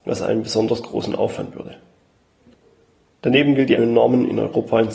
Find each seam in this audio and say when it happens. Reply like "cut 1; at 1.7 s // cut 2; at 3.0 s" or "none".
cut 1; at 1.5 s // cut 2; at 3.8 s